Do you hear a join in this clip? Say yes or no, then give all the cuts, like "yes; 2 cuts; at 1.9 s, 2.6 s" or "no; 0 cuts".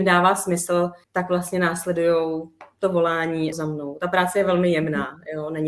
yes; 2 cuts; at 1.0 s, 3.5 s